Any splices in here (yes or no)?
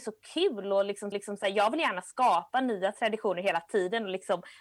yes